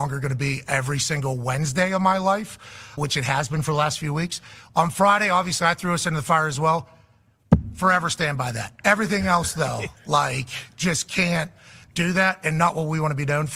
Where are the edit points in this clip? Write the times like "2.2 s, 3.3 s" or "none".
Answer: 3.0 s